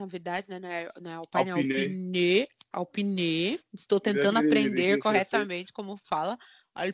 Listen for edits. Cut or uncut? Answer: uncut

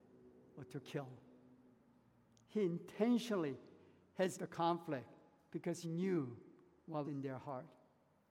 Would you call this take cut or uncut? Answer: cut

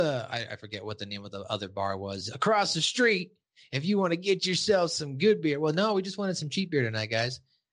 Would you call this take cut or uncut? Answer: uncut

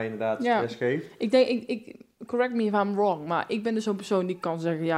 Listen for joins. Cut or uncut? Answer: uncut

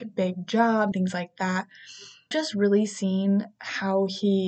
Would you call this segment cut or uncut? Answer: cut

